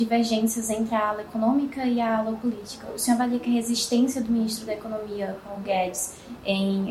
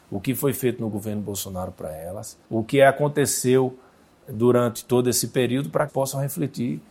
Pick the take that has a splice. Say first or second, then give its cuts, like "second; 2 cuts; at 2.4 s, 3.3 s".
second; 2 cuts; at 2.4 s, 5.9 s